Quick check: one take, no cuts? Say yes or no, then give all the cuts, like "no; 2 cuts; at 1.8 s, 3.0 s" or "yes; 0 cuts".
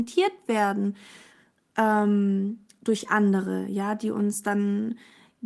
yes; 0 cuts